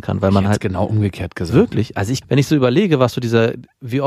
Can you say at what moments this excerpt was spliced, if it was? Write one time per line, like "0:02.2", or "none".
0:02.2